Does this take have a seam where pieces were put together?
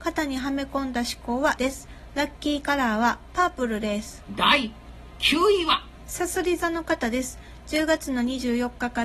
yes; 1 cut; at 1.6 s

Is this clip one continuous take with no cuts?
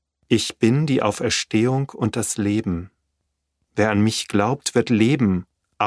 yes; 0 cuts

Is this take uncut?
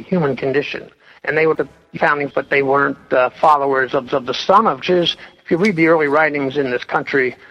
no; 6 cuts; at 1.1 s, 1.5 s, 2.0 s, 2.3 s, 4.1 s, 4.8 s

